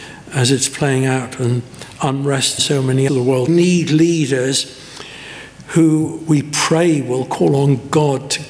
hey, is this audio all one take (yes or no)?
no